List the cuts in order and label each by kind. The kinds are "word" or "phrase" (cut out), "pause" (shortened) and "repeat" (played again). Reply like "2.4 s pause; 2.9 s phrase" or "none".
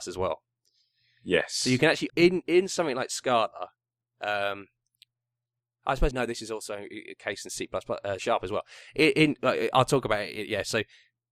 2.1 s phrase; 6.1 s word; 8.2 s word